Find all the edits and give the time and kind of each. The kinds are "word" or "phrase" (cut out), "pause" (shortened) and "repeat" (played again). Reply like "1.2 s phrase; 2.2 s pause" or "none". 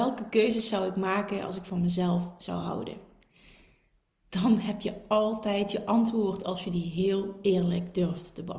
none